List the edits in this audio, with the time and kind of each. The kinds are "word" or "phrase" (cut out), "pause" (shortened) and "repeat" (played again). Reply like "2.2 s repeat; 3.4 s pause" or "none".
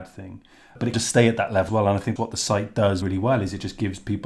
0.9 s word; 1.7 s word; 2.2 s word; 3.0 s word